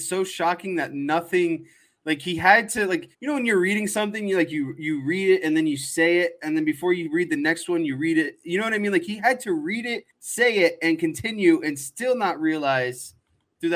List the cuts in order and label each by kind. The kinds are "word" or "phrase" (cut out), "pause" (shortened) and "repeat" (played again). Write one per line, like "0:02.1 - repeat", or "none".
0:03.1 - pause
0:10.1 - pause